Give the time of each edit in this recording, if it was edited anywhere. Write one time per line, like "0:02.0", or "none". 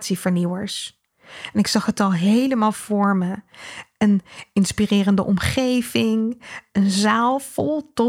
none